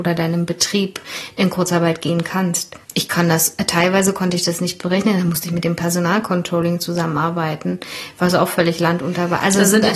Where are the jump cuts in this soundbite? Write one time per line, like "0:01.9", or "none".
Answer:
0:02.8